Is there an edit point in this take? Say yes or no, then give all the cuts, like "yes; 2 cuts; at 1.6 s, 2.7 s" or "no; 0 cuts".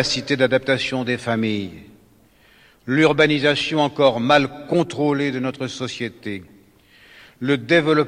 no; 0 cuts